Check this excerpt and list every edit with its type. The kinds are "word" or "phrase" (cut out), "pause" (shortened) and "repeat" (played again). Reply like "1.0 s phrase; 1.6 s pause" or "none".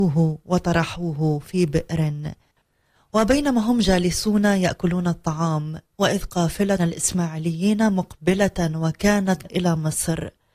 6.8 s word; 9.4 s word